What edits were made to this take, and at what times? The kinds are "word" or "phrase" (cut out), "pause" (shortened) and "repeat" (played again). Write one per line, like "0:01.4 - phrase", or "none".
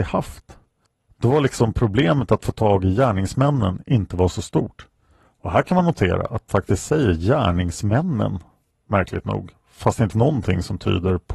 0:06.5 - word
0:10.1 - word